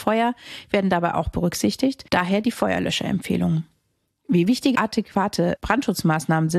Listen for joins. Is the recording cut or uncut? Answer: cut